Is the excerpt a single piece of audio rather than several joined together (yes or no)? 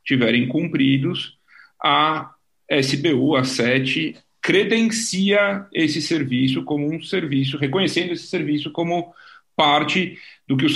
yes